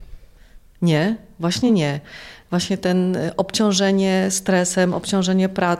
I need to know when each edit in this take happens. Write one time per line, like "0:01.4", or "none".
none